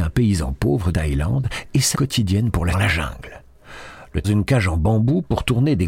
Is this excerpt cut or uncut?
cut